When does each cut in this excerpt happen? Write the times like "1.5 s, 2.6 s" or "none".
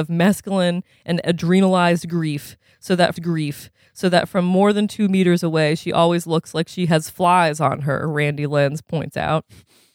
3.2 s